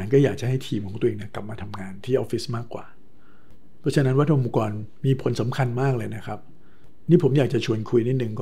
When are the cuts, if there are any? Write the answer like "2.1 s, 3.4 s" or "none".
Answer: none